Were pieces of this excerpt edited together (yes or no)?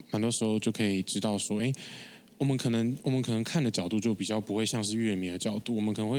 no